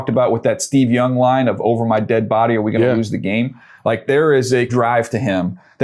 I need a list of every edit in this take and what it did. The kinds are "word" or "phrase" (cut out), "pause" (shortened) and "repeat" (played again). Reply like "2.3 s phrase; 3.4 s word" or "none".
4.7 s word